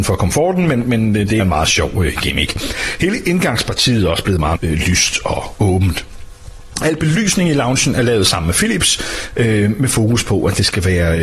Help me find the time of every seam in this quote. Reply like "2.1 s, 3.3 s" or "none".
1.4 s, 4.6 s, 6.8 s